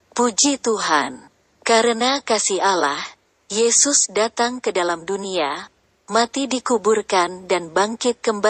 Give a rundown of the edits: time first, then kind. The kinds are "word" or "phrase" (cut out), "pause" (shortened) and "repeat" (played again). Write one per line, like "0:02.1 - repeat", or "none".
none